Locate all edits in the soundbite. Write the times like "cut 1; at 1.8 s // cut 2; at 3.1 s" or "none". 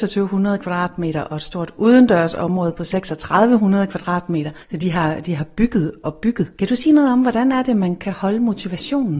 cut 1; at 4.6 s // cut 2; at 6.5 s